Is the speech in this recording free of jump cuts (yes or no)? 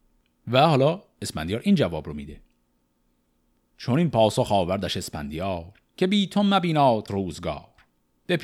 no